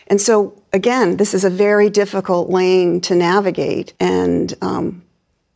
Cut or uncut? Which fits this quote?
cut